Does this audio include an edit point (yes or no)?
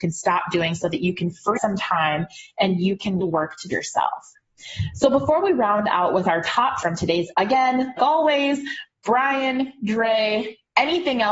yes